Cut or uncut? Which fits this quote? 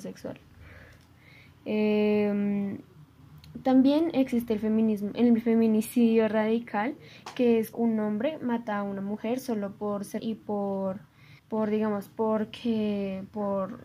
cut